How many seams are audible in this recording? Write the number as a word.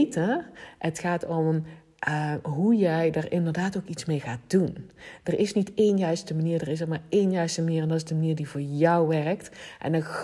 zero